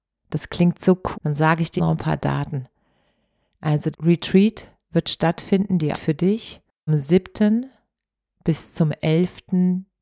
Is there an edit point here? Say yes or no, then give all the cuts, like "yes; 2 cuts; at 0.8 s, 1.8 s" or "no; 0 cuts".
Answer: yes; 5 cuts; at 1.1 s, 1.8 s, 3.9 s, 5.9 s, 6.9 s